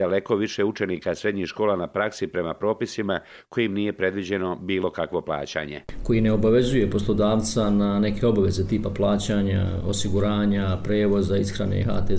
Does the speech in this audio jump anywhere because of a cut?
no; 0 cuts

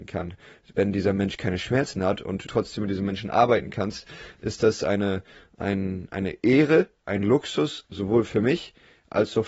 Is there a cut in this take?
yes; 1 cut; at 2.5 s

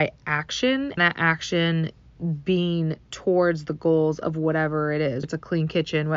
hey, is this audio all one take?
no; 2 cuts; at 1.0 s, 5.2 s

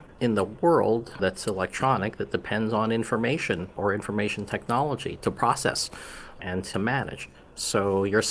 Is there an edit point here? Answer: no; 0 cuts

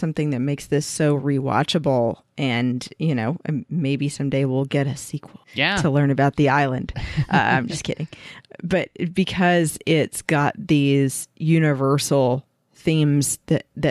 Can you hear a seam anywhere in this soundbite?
yes; 2 cuts; at 5.4 s, 12.6 s

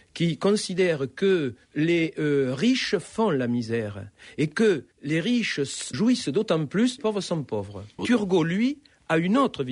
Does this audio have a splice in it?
yes; 5 cuts; at 1.6 s, 4.9 s, 5.9 s, 7.0 s, 8.0 s

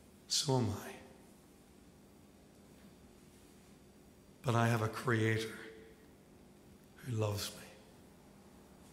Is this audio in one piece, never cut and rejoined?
yes; 0 cuts

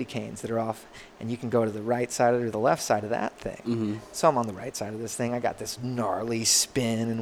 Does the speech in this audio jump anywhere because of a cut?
no; 0 cuts

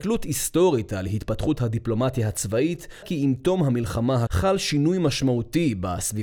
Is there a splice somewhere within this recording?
yes; 2 cuts; at 3.0 s, 4.3 s

